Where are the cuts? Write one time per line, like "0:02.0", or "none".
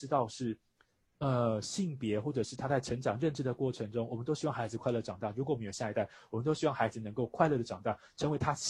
none